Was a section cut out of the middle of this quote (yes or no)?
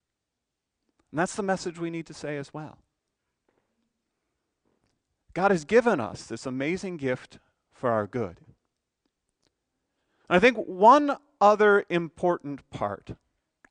no